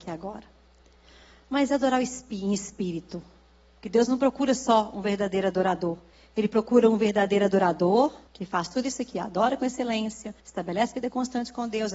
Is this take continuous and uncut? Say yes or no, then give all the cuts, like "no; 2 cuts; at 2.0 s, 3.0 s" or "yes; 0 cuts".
no; 3 cuts; at 6.1 s, 8.3 s, 10.4 s